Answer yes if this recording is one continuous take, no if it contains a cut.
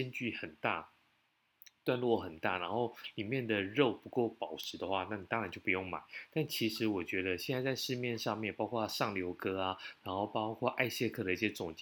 yes